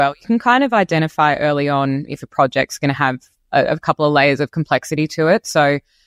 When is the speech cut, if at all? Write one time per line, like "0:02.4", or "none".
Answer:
none